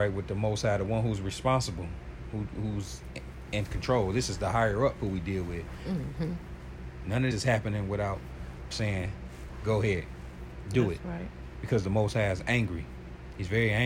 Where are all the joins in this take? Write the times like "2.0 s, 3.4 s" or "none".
7.3 s, 8.7 s